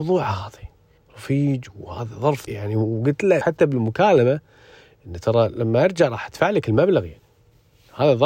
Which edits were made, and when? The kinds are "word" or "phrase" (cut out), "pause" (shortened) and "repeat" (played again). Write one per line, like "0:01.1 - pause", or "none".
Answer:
0:01.0 - pause
0:02.5 - word
0:03.4 - word